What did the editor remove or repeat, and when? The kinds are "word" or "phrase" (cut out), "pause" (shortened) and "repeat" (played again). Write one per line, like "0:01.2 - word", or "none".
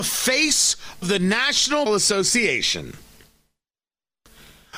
0:01.0 - word
0:01.9 - word